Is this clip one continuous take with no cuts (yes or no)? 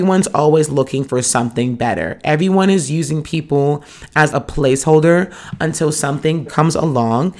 no